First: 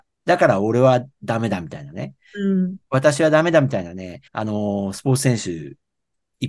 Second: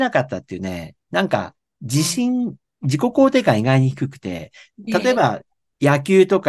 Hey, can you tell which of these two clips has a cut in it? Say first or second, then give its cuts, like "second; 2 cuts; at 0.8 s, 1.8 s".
first; 1 cut; at 4.3 s